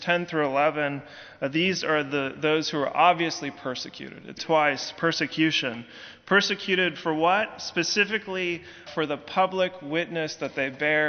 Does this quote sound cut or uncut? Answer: cut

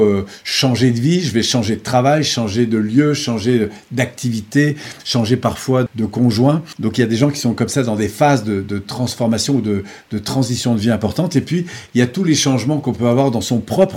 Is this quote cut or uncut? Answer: uncut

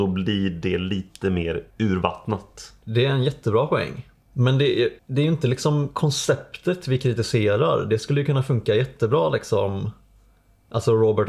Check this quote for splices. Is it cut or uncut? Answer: uncut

